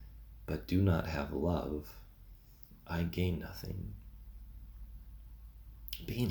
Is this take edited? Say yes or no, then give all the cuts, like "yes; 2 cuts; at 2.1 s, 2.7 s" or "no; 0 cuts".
no; 0 cuts